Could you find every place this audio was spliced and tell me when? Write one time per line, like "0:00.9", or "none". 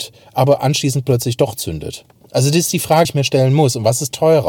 0:02.2
0:03.0